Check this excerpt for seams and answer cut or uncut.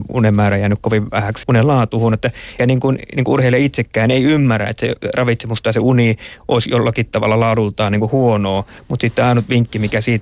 cut